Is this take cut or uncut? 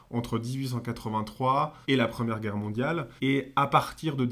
cut